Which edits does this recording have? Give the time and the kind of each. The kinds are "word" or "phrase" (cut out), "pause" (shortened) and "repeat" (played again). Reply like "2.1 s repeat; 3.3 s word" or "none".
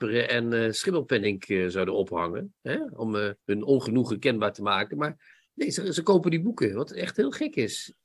3.4 s pause; 5.4 s pause

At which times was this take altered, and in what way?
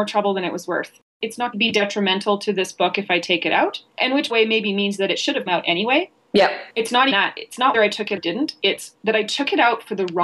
1.5 s phrase; 4.3 s phrase; 5.5 s word; 6.7 s pause; 7.1 s word; 7.7 s word; 8.2 s word

